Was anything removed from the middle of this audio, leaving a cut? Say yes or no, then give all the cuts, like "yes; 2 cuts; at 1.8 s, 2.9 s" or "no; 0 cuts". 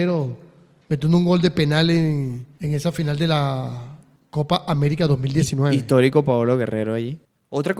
no; 0 cuts